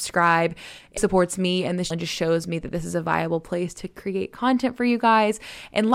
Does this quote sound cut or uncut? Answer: cut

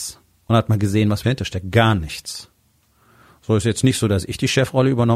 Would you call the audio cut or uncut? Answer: cut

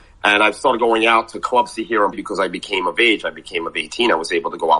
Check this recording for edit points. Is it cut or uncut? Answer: cut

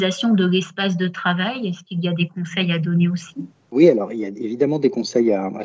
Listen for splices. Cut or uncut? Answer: uncut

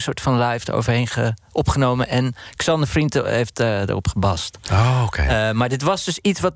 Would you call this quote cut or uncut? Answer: uncut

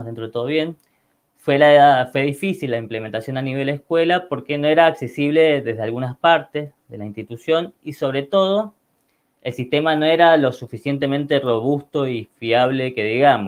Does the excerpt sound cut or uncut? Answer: uncut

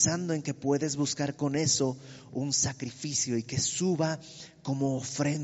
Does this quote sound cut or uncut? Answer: uncut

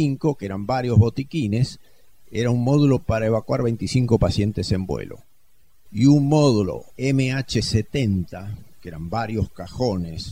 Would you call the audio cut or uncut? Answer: uncut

